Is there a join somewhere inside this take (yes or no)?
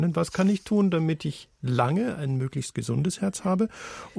no